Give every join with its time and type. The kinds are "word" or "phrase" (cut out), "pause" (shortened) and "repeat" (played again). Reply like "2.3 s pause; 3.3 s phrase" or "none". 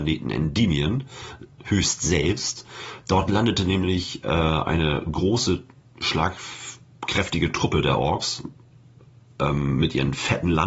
none